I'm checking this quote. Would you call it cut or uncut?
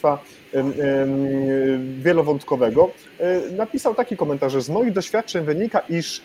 uncut